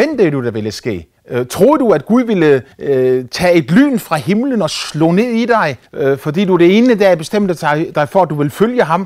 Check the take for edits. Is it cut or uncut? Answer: cut